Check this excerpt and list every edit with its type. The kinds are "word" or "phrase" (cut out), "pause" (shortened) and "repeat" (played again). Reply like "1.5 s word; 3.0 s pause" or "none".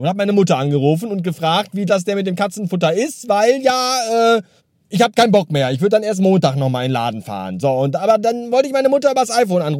1.9 s word; 4.6 s pause

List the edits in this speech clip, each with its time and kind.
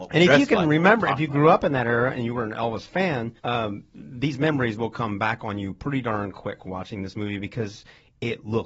3.4 s pause

